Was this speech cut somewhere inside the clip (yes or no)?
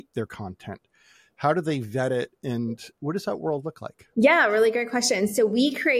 yes